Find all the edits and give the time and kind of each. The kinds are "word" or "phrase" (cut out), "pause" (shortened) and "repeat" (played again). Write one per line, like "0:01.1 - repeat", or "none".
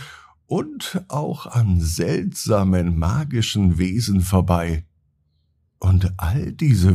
none